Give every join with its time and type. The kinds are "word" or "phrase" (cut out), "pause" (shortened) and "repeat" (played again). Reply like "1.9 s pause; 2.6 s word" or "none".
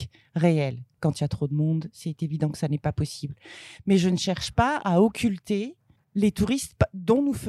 6.0 s pause